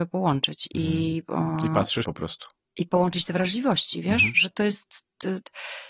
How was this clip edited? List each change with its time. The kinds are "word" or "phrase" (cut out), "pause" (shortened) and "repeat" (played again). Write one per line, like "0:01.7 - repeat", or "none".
0:02.0 - word